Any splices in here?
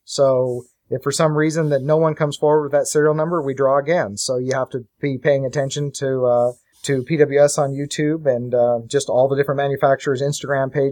yes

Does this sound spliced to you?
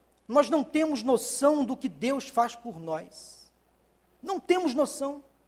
no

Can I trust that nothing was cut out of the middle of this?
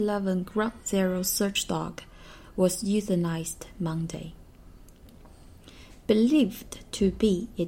yes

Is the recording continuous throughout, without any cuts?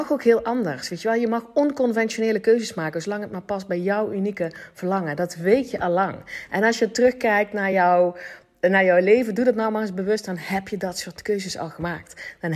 yes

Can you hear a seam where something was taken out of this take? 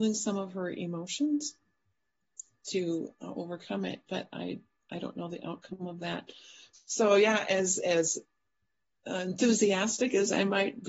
no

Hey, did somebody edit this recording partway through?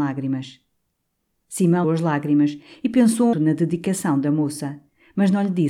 yes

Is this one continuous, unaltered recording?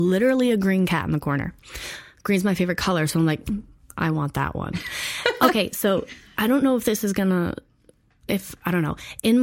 yes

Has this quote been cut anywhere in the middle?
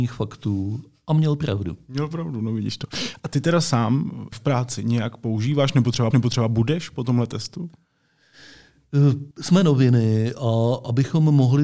yes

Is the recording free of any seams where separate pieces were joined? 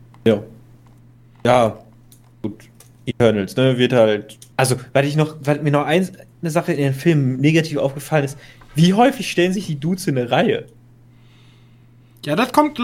no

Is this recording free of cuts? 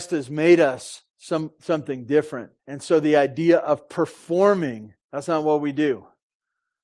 no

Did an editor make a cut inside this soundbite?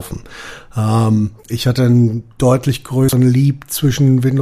yes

